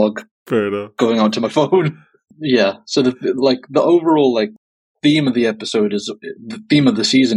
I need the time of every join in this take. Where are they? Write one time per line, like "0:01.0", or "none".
none